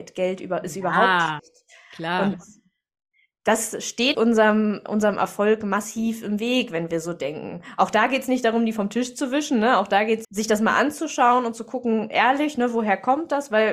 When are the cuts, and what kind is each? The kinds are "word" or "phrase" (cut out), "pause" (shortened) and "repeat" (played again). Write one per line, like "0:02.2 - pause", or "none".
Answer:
0:01.4 - word
0:04.1 - word
0:10.2 - word